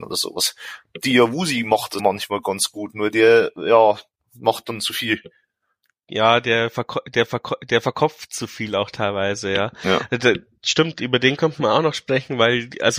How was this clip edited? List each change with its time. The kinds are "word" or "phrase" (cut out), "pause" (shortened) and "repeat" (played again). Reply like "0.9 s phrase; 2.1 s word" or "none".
2.0 s word; 7.3 s repeat